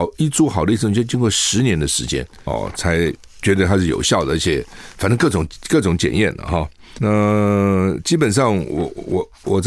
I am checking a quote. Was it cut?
no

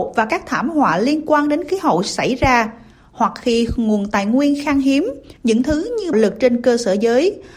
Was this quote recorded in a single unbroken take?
no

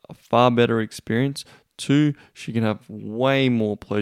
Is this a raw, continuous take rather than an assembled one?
yes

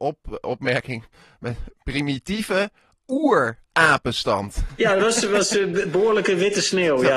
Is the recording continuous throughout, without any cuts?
yes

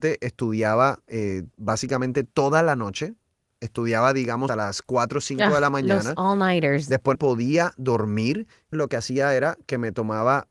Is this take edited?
yes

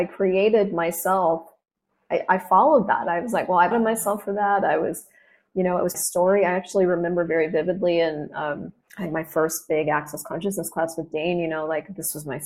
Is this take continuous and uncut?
no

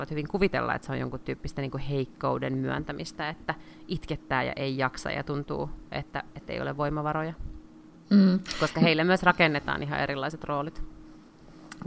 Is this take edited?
no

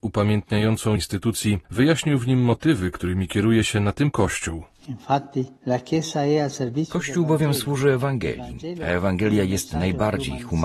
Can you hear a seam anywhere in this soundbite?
yes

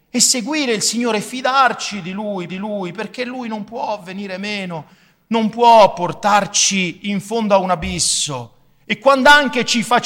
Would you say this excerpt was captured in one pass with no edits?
no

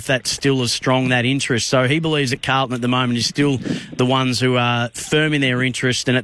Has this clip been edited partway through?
no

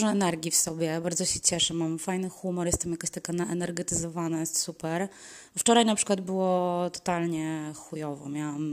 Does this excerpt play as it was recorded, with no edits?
yes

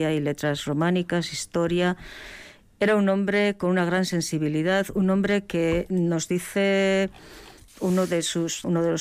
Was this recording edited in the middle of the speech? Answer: no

